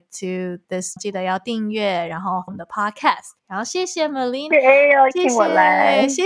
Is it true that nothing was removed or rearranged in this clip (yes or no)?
no